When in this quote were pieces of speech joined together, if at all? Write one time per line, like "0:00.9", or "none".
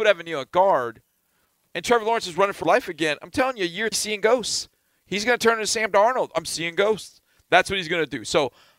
0:02.6
0:03.9

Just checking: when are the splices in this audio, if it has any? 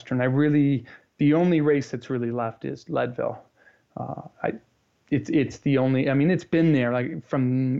none

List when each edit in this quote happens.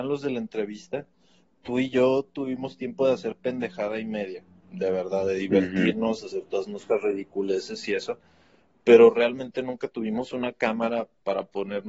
none

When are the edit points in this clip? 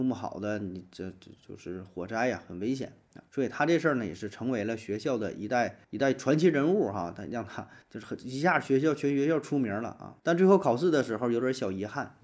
0:03.3
0:05.8
0:07.8
0:10.2

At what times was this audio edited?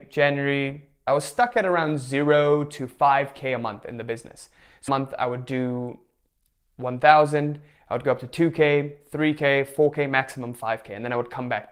0:01.1
0:04.9

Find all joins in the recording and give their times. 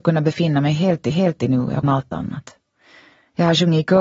0:01.1
0:01.8

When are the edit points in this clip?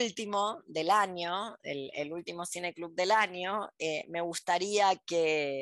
none

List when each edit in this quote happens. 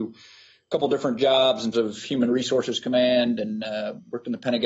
0:01.7

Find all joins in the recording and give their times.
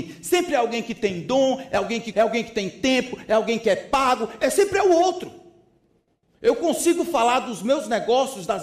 0:02.1
0:04.4

